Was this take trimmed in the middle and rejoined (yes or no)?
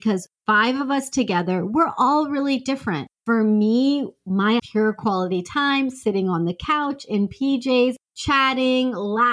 yes